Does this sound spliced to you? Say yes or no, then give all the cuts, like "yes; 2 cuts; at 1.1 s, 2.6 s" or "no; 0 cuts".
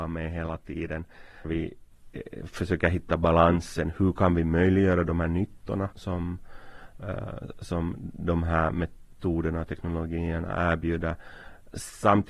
yes; 2 cuts; at 1.4 s, 5.9 s